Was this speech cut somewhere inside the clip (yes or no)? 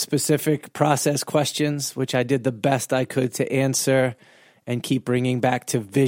no